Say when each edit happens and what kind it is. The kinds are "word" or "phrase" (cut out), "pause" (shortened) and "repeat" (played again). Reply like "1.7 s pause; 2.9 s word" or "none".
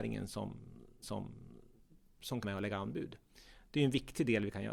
1.0 s repeat; 2.4 s word